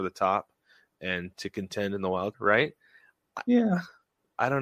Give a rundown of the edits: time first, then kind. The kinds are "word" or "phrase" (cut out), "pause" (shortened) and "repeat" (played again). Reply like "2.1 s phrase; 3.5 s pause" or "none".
2.3 s word